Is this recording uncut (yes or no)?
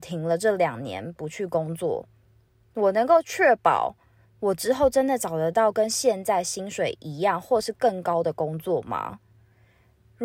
yes